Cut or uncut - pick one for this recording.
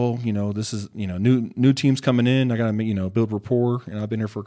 uncut